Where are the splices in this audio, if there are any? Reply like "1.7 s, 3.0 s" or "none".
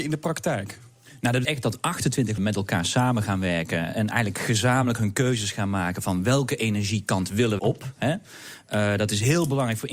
1.4 s, 2.4 s, 7.6 s